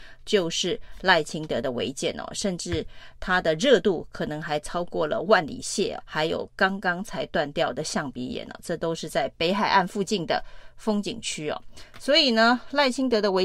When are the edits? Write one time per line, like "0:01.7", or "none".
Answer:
0:06.0